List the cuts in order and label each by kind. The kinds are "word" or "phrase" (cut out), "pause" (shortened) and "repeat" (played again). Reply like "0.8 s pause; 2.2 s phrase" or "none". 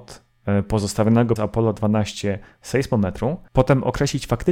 1.4 s word